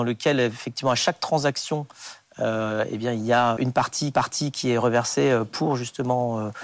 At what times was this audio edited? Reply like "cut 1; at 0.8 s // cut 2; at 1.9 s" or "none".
cut 1; at 3.6 s // cut 2; at 4.1 s